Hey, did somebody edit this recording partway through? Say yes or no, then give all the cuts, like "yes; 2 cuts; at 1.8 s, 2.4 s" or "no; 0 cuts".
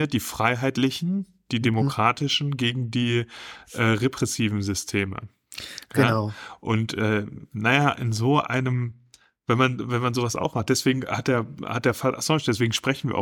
no; 0 cuts